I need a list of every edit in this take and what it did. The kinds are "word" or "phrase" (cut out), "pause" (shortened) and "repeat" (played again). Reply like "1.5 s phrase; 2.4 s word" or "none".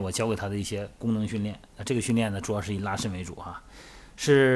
1.7 s pause